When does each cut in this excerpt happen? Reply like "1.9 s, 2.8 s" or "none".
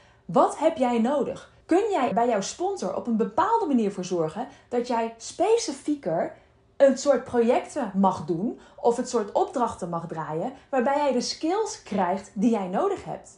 1.6 s, 2.1 s